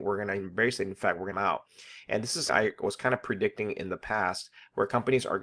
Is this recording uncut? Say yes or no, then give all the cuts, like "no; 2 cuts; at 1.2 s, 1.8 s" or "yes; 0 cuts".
no; 2 cuts; at 1.3 s, 2.5 s